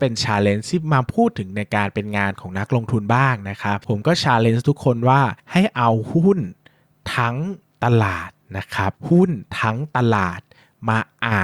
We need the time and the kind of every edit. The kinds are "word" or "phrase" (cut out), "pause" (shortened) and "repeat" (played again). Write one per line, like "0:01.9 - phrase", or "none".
0:05.4 - pause
0:07.6 - pause